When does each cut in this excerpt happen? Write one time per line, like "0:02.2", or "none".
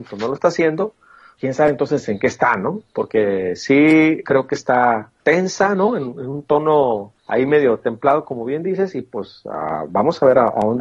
0:01.4
0:04.2
0:05.2
0:07.2